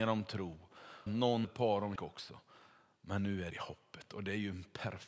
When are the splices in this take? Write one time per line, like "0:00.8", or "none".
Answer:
0:01.1
0:01.4
0:02.0
0:03.5